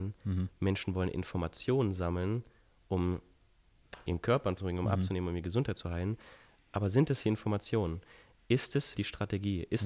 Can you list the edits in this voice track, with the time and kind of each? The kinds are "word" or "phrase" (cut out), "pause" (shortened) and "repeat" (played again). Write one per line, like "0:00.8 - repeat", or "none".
0:04.6 - word
0:07.2 - word
0:08.9 - word